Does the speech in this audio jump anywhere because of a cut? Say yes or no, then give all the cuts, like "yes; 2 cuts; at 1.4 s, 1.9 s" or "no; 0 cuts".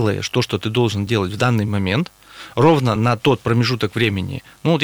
no; 0 cuts